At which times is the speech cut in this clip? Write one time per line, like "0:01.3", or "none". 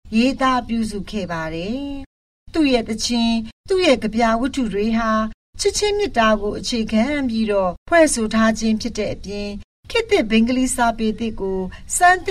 none